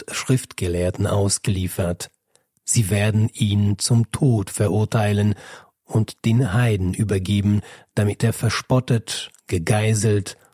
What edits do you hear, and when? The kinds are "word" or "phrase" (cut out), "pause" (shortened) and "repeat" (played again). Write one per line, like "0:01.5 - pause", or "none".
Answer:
none